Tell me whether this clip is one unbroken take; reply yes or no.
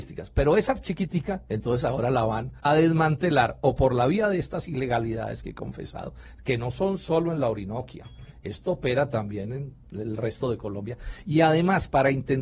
no